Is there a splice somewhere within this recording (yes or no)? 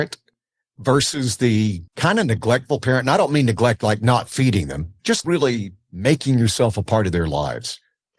yes